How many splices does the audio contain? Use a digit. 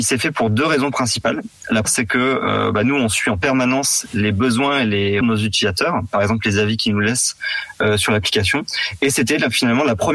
2